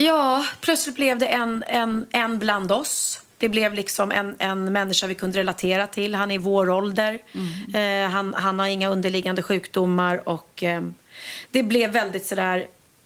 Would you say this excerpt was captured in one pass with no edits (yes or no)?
yes